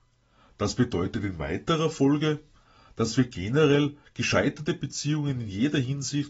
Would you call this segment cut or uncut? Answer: uncut